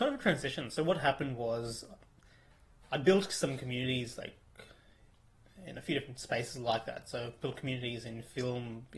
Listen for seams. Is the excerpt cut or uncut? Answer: uncut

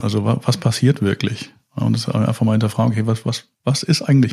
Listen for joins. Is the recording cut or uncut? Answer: uncut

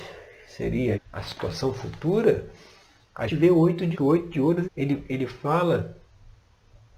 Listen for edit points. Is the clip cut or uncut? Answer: cut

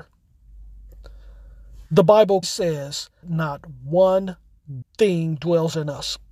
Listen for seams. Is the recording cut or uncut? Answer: cut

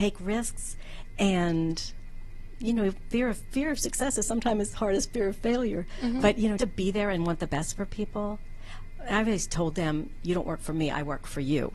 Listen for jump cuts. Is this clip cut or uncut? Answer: cut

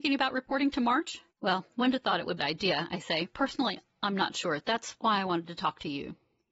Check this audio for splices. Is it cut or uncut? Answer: cut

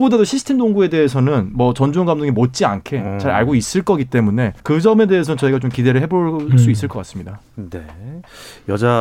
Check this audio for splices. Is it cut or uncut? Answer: cut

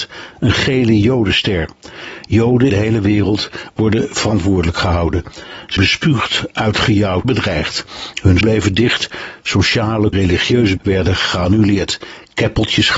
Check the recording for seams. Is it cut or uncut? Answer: cut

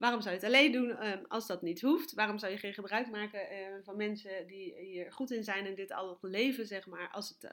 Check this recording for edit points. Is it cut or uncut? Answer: uncut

